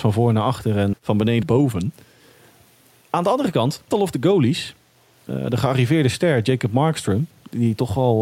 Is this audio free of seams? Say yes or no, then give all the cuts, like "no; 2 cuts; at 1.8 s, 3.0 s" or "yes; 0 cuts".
no; 3 cuts; at 0.9 s, 1.4 s, 3.9 s